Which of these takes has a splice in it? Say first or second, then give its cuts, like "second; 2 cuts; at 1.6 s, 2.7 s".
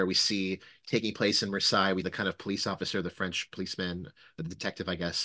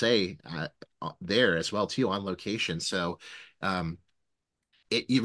first; 1 cut; at 2.0 s